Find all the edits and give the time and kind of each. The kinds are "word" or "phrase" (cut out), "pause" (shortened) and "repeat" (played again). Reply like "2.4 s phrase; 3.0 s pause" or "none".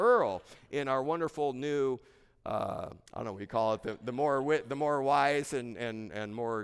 3.1 s pause